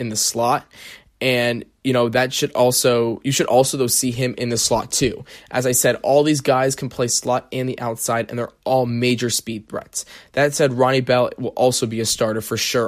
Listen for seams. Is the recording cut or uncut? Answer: uncut